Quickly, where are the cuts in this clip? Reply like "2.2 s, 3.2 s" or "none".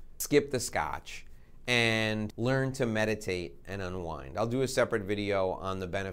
none